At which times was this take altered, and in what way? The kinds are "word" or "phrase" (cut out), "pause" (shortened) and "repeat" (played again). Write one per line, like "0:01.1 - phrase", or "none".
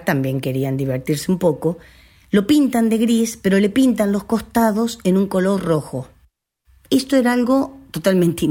none